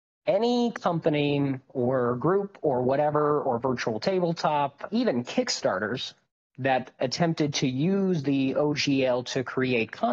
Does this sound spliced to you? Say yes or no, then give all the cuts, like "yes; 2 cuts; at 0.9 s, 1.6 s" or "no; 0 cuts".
yes; 1 cut; at 4.9 s